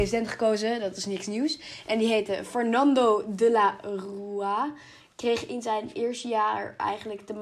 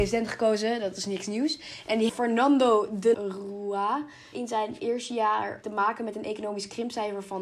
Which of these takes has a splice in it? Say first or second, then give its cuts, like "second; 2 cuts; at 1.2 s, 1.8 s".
second; 4 cuts; at 2.1 s, 3.1 s, 4.3 s, 5.6 s